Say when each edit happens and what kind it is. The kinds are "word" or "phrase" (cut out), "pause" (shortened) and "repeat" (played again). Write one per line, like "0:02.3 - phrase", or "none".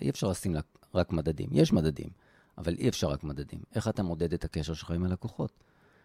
none